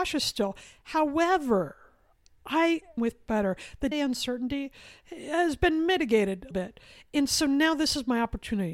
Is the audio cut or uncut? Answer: cut